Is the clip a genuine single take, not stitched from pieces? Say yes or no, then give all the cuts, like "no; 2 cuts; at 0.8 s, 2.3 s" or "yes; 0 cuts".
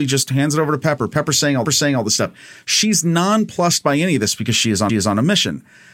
no; 2 cuts; at 1.7 s, 4.9 s